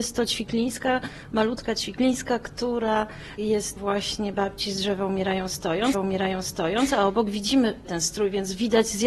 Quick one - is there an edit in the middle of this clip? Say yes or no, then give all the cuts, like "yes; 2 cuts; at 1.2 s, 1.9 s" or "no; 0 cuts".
yes; 3 cuts; at 3.8 s, 5.9 s, 7.8 s